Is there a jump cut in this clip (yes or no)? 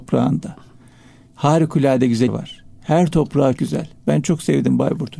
yes